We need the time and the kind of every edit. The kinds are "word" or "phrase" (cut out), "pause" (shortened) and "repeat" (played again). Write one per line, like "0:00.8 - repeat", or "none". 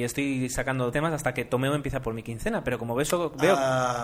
0:00.9 - word
0:02.0 - word